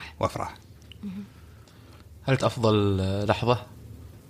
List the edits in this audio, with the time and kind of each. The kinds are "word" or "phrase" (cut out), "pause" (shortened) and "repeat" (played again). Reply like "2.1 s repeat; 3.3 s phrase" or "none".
2.4 s word